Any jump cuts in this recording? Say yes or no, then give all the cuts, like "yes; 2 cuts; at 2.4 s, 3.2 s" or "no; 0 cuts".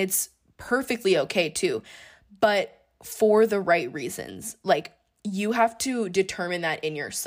no; 0 cuts